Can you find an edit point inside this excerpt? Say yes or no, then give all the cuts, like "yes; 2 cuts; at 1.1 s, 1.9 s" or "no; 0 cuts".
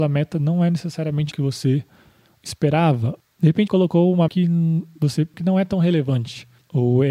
yes; 4 cuts; at 1.3 s, 3.7 s, 4.3 s, 5.3 s